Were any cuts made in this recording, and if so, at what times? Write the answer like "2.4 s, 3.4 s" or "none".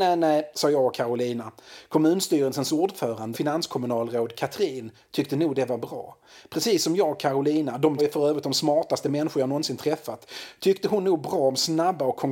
3.3 s, 8.0 s

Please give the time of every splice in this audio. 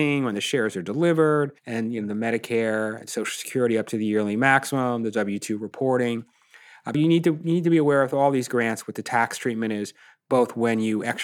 1.6 s, 6.9 s

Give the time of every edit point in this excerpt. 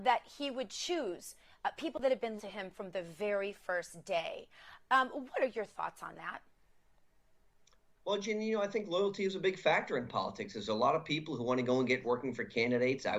2.4 s, 12.0 s

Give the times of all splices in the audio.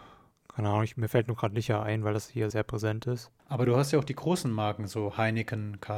2.5 s, 3.4 s

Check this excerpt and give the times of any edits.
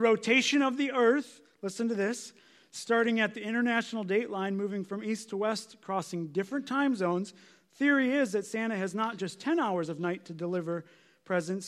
none

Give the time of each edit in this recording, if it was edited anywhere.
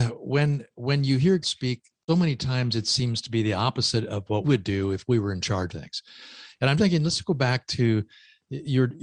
1.4 s, 2.1 s, 4.4 s, 5.7 s, 6.8 s

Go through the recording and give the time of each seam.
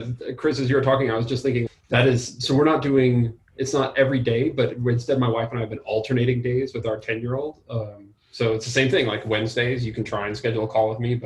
1.7 s

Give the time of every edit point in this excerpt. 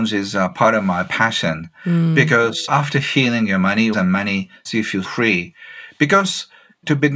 2.7 s, 3.9 s, 4.7 s, 5.0 s

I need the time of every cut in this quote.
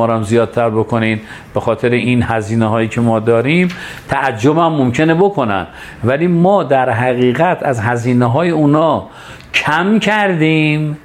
none

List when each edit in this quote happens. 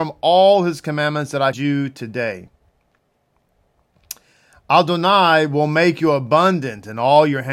1.5 s

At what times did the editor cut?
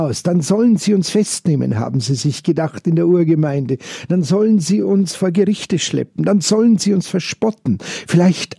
none

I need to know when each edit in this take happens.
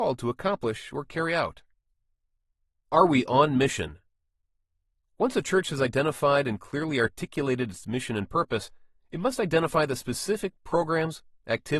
none

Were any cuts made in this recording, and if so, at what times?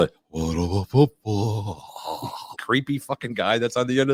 2.5 s

